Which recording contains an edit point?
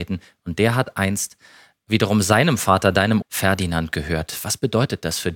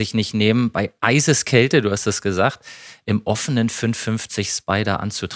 first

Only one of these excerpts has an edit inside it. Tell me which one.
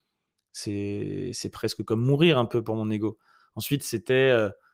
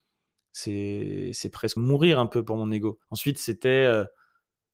second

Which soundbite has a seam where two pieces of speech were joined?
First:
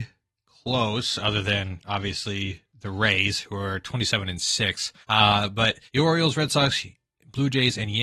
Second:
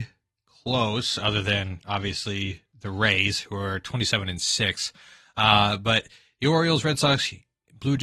first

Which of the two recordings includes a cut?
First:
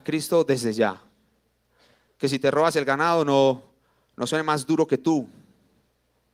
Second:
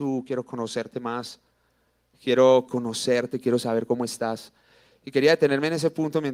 second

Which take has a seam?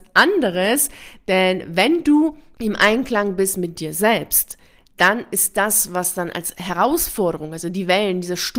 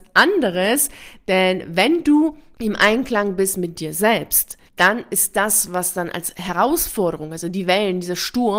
second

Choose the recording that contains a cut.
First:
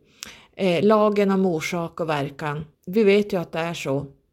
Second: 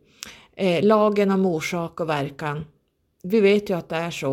first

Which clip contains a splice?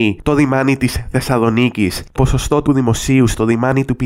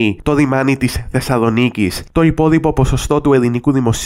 first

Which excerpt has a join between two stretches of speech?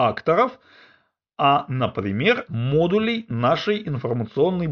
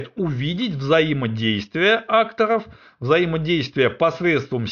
first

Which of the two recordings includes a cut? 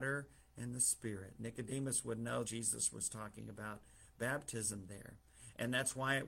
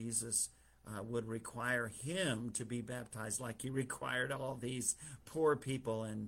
first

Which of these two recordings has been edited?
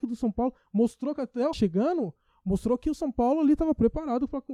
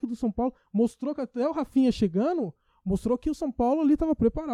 first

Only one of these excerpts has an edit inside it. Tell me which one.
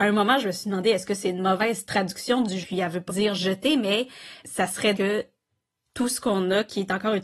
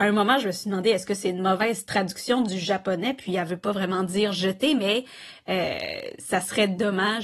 first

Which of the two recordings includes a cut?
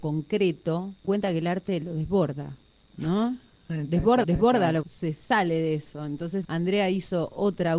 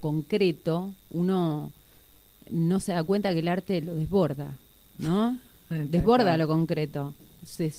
first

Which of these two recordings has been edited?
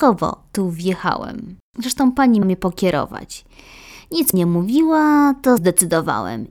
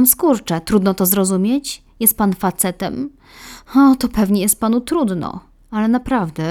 first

